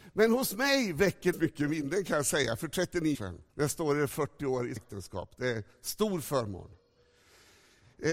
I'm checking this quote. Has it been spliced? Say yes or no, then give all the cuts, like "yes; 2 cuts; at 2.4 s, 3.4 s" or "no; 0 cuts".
yes; 4 cuts; at 1.3 s, 3.1 s, 3.5 s, 4.8 s